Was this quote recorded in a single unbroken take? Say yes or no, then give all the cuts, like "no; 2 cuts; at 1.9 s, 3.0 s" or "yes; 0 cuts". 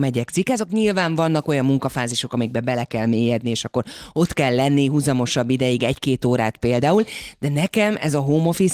yes; 0 cuts